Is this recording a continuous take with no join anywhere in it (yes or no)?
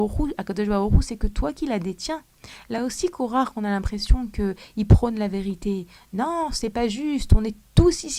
yes